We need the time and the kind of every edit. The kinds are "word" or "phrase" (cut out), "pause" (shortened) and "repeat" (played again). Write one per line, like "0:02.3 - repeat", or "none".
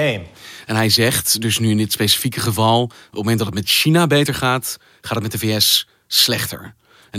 none